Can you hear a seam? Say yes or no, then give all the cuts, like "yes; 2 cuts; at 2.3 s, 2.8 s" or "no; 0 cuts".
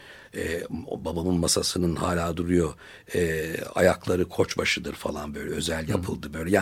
no; 0 cuts